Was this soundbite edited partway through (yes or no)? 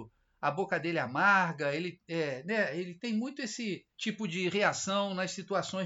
yes